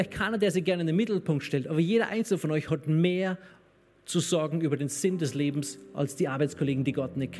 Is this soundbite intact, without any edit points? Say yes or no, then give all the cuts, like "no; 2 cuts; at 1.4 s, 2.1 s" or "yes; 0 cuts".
yes; 0 cuts